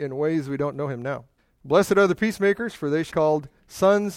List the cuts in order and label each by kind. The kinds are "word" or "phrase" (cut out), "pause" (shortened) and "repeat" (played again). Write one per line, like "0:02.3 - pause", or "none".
0:01.4 - pause
0:03.1 - word

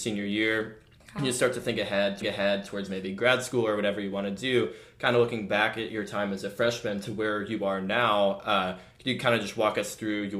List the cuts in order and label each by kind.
0:02.2 - repeat

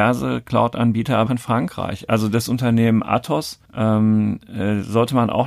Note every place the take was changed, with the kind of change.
0:01.3 - phrase
0:03.7 - pause

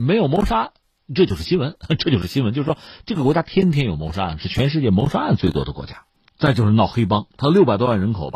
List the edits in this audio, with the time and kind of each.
0:06.1 - pause

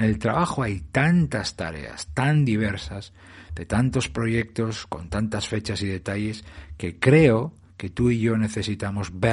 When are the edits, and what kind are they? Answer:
none

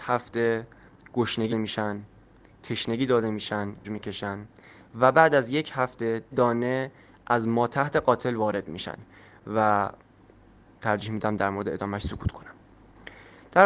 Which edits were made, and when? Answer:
0:01.5 - word
0:03.8 - word
0:06.3 - word

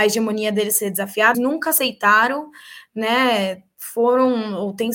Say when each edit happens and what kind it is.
0:01.3 - word

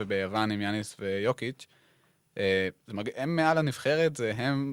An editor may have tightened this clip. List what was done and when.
0:02.8 - pause

